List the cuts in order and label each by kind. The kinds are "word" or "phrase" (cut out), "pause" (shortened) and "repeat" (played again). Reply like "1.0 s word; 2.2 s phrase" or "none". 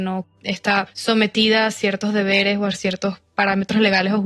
none